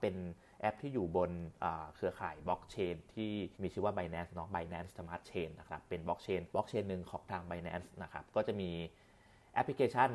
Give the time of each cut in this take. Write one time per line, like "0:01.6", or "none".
0:03.5
0:06.5

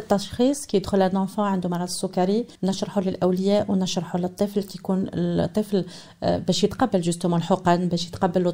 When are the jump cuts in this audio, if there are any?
0:02.5

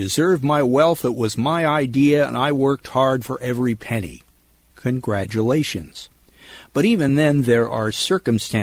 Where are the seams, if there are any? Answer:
none

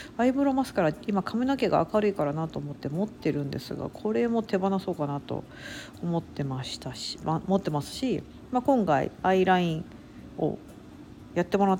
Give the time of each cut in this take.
0:07.2

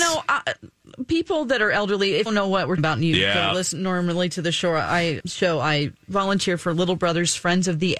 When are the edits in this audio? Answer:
0:02.3
0:02.8
0:05.2

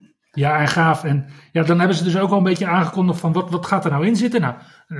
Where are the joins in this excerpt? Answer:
none

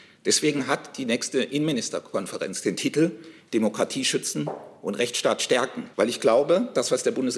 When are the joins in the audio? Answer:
0:05.9

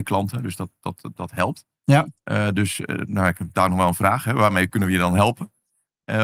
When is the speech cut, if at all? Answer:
none

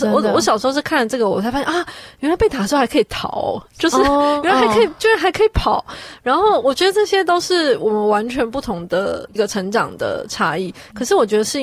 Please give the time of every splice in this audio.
none

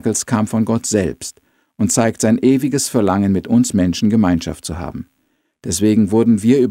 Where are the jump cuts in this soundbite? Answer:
none

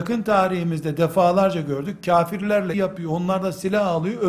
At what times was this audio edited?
0:02.7

